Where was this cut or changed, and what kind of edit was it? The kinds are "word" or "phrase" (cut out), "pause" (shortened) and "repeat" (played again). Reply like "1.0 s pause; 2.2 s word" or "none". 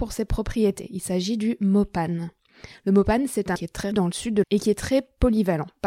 3.6 s word; 3.9 s word; 4.4 s word